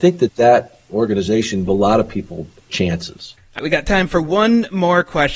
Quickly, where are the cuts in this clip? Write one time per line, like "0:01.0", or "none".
0:01.7
0:02.7
0:03.6